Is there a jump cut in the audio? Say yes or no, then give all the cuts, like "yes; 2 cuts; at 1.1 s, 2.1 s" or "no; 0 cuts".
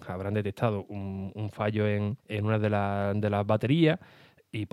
yes; 1 cut; at 2.2 s